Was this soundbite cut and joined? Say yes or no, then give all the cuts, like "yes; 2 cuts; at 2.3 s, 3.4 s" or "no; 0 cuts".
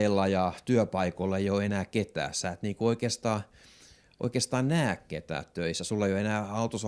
no; 0 cuts